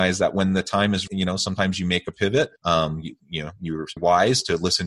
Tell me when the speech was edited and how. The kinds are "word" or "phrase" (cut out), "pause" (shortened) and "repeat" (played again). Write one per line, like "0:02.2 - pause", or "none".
0:01.1 - word
0:02.6 - pause
0:04.0 - word